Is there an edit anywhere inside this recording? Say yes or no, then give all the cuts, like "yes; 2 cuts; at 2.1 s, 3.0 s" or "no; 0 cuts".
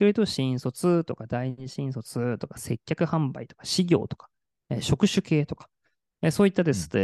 no; 0 cuts